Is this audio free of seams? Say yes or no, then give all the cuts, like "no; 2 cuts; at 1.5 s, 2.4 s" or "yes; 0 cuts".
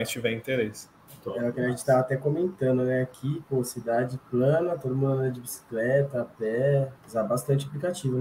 yes; 0 cuts